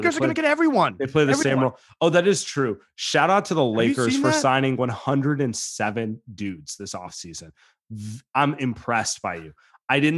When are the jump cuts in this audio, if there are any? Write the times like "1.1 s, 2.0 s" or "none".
none